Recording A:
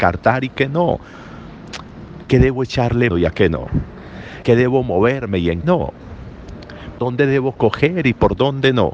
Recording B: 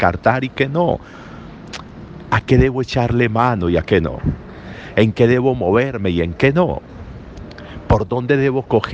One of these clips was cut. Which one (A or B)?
A